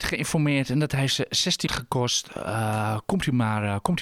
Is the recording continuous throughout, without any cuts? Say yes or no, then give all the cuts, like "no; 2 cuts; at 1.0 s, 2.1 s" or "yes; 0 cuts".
no; 1 cut; at 1.7 s